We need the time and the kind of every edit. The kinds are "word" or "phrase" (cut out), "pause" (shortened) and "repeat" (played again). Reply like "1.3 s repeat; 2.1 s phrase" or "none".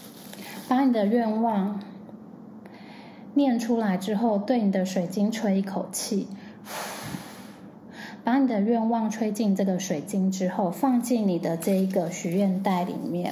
none